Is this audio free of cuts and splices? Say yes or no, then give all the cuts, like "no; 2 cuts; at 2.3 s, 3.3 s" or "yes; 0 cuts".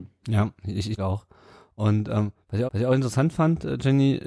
no; 2 cuts; at 1.0 s, 2.7 s